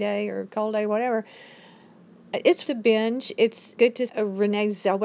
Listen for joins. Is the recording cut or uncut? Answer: cut